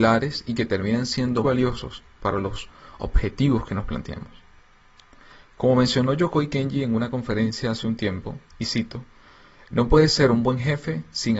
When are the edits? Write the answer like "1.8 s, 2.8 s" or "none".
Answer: 1.4 s, 8.5 s

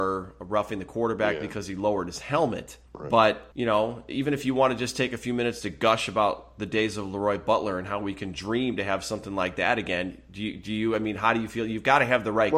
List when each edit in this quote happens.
2.9 s, 3.5 s

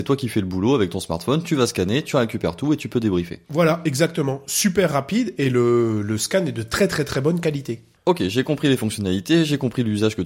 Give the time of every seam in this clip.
3.4 s

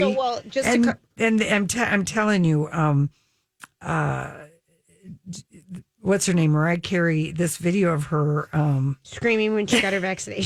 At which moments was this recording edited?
none

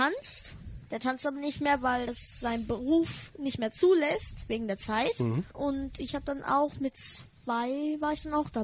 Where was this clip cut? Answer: none

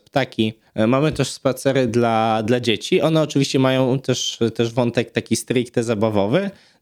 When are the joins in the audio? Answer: none

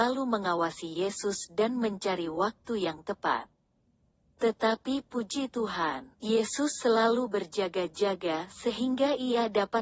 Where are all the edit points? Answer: 6.1 s

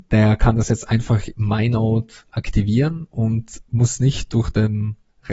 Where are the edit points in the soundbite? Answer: 1.4 s

